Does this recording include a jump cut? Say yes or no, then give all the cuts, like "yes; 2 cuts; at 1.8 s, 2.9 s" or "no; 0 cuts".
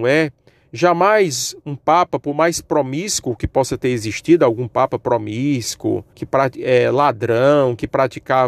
yes; 1 cut; at 6.1 s